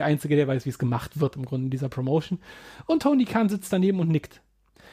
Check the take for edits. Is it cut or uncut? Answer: uncut